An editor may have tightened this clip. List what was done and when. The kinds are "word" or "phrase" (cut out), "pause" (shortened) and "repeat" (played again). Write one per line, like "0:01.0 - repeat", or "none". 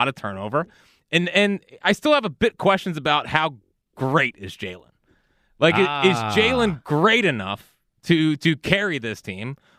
none

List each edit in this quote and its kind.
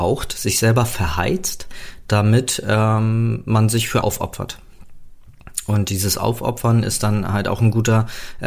0:04.0 - word

